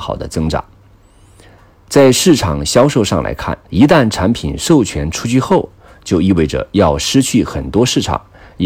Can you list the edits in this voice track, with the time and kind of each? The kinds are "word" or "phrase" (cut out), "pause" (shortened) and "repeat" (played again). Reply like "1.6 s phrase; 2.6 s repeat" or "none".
3.6 s pause